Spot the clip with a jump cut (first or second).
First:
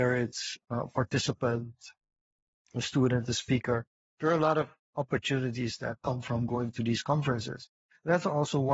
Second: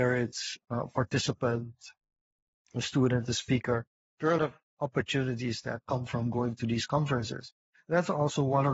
second